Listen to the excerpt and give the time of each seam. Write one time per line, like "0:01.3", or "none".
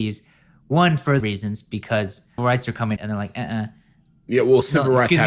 0:01.2
0:02.4
0:03.0